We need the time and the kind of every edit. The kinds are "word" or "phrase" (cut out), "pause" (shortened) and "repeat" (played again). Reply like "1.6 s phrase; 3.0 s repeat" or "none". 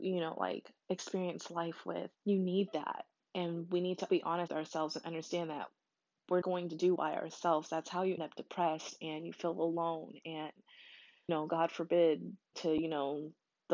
2.1 s word; 4.1 s word; 4.5 s word; 6.4 s word; 7.0 s word; 8.2 s word; 11.3 s word; 12.5 s word